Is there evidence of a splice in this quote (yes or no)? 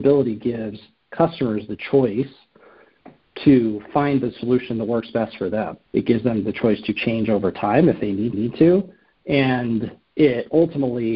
yes